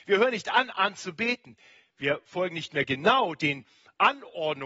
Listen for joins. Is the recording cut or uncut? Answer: uncut